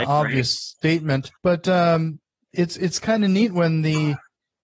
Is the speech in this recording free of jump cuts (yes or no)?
no